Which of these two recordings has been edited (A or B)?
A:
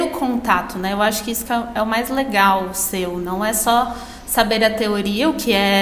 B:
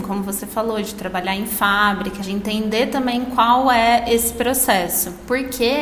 B